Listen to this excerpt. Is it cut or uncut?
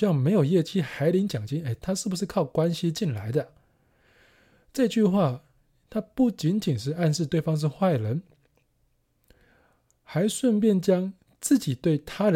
uncut